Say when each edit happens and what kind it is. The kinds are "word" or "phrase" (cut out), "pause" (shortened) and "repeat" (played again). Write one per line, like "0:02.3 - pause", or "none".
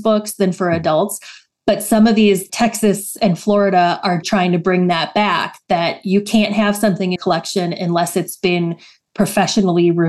0:02.5 - word
0:04.2 - word
0:07.2 - word